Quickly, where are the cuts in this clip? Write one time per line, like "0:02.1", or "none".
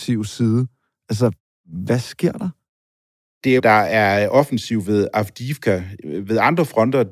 0:03.6